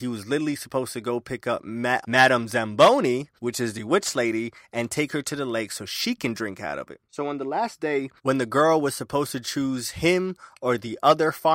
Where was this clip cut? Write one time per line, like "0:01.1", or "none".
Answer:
0:02.0
0:03.4
0:07.0
0:08.2